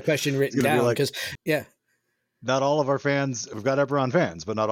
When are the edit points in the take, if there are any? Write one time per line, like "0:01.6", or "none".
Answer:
0:01.3